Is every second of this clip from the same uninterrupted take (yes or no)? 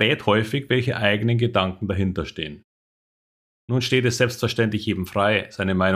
yes